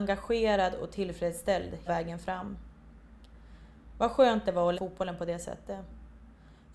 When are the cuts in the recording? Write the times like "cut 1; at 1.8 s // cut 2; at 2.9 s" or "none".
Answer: cut 1; at 1.9 s // cut 2; at 4.7 s

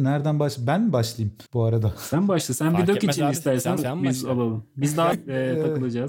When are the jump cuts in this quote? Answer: cut 1; at 1.5 s // cut 2; at 3.8 s // cut 3; at 5.1 s

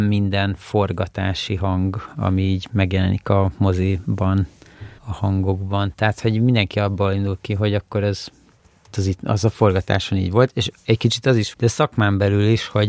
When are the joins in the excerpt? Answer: cut 1; at 5.0 s // cut 2; at 8.9 s // cut 3; at 11.5 s

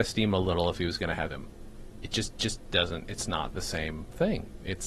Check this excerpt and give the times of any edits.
cut 1; at 1.3 s // cut 2; at 2.4 s

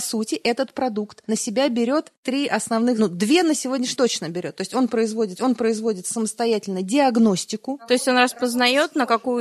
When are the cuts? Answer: cut 1; at 4.0 s // cut 2; at 5.4 s

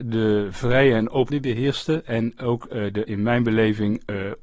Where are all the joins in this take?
cut 1; at 1.3 s

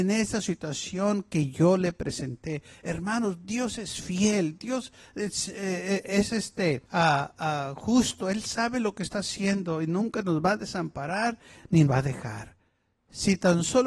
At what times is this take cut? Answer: cut 1; at 6.8 s // cut 2; at 11.9 s

